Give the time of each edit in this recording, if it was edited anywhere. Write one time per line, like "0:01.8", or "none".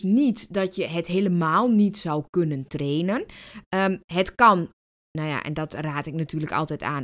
none

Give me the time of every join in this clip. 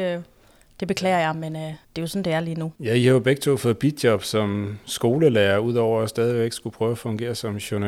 0:01.8
0:02.7

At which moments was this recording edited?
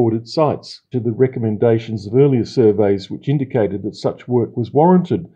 0:00.9

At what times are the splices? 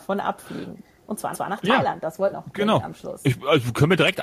0:01.3
0:02.3

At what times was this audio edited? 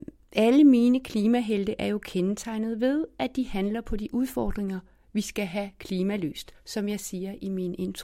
none

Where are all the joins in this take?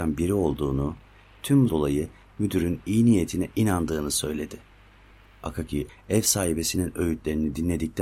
0:01.7
0:05.9

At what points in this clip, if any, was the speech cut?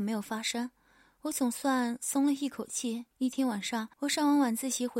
0:03.1
0:03.9

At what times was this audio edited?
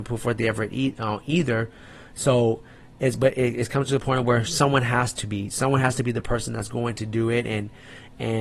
none

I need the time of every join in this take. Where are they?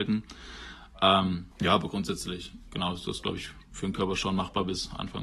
0:01.5

